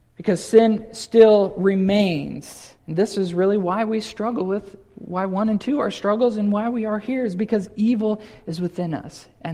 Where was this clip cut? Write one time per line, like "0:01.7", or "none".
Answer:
0:02.8